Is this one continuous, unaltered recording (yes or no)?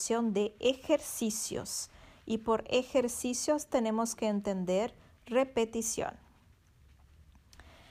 yes